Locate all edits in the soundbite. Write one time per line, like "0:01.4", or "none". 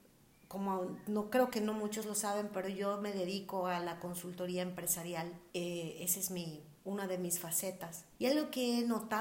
0:05.5
0:06.8
0:08.1